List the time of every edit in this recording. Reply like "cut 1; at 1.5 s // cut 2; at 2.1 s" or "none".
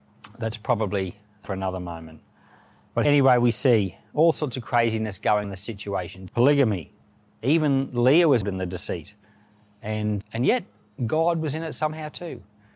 cut 1; at 1.4 s // cut 2; at 3.0 s // cut 3; at 5.4 s // cut 4; at 6.3 s // cut 5; at 8.4 s // cut 6; at 10.2 s

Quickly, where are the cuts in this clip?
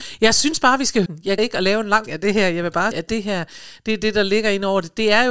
cut 1; at 1.1 s // cut 2; at 1.4 s // cut 3; at 2.1 s // cut 4; at 2.9 s

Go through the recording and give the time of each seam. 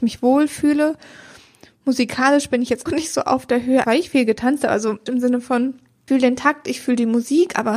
cut 1; at 2.9 s // cut 2; at 3.8 s // cut 3; at 5.1 s // cut 4; at 6.1 s

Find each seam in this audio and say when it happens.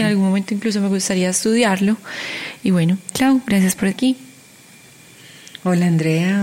cut 1; at 3.1 s // cut 2; at 3.9 s

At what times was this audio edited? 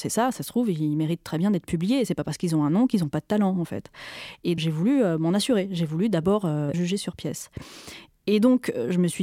cut 1; at 4.6 s // cut 2; at 6.7 s

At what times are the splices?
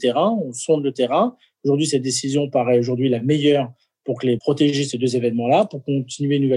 cut 1; at 4.4 s

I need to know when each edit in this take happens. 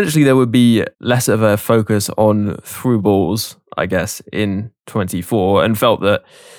cut 1; at 0.9 s // cut 2; at 4.8 s

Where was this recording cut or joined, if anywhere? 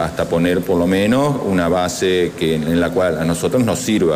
none

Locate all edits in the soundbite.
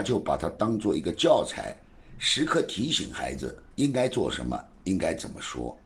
cut 1; at 3.7 s

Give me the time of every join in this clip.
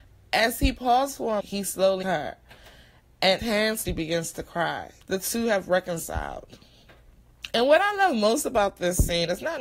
cut 1; at 1.4 s // cut 2; at 2.0 s // cut 3; at 3.4 s // cut 4; at 3.9 s // cut 5; at 5.0 s

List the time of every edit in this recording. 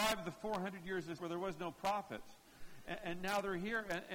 cut 1; at 1.2 s

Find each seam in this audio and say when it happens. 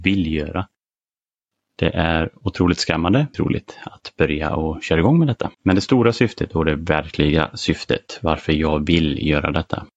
cut 1; at 3.3 s // cut 2; at 5.5 s

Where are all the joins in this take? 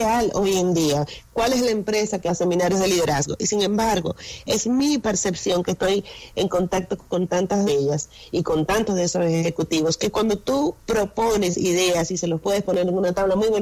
cut 1; at 2.3 s // cut 2; at 7.7 s

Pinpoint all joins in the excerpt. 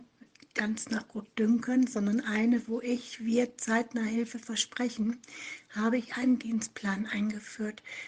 none

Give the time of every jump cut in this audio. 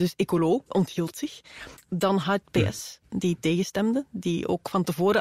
cut 1; at 2.4 s

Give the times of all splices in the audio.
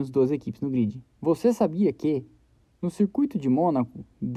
cut 1; at 1.1 s

